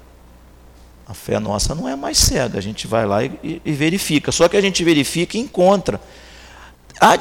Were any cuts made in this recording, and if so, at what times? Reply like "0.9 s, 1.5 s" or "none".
none

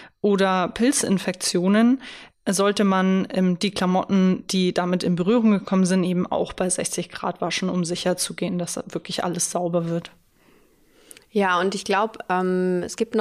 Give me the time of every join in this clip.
none

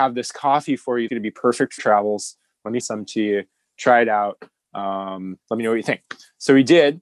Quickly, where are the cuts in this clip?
1.1 s, 1.8 s, 2.8 s

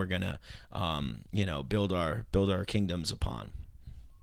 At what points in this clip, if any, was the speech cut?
1.3 s

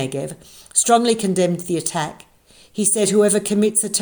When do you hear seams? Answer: none

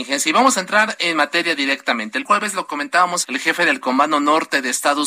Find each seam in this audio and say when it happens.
2.2 s, 3.2 s

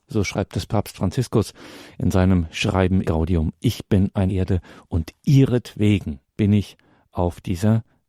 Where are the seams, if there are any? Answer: 3.0 s, 4.3 s

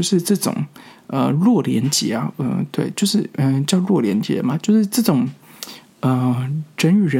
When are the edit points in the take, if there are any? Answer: none

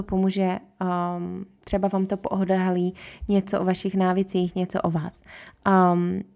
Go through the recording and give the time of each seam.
none

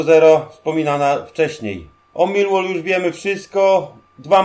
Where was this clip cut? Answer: none

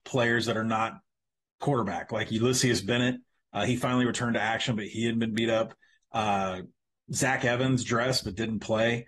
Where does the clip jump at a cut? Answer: none

